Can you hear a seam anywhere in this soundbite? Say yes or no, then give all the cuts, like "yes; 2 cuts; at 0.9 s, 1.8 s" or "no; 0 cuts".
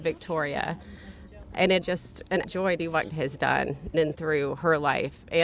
yes; 5 cuts; at 1.8 s, 2.4 s, 2.8 s, 3.1 s, 3.9 s